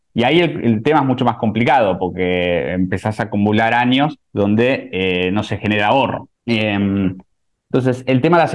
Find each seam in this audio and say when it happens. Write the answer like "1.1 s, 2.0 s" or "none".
4.2 s, 6.4 s